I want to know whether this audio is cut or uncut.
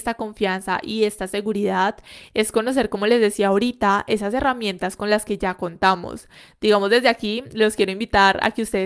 uncut